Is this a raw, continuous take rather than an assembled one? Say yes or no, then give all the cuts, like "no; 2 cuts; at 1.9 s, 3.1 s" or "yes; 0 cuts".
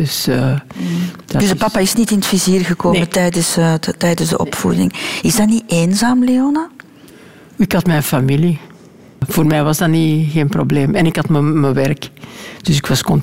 yes; 0 cuts